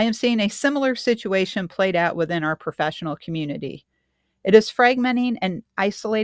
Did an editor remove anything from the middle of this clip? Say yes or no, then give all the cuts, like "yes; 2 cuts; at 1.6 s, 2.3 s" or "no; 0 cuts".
no; 0 cuts